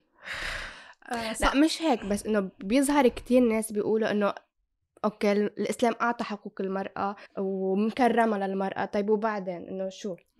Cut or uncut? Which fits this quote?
cut